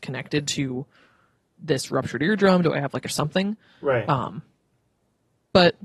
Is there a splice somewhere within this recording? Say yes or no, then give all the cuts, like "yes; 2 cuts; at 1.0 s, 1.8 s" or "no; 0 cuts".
yes; 1 cut; at 3.0 s